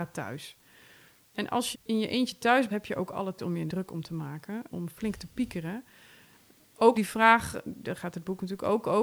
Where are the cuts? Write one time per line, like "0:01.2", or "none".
0:01.7
0:02.7
0:03.4
0:03.7
0:04.7
0:06.9